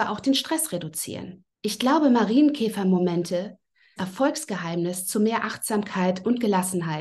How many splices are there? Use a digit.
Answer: 2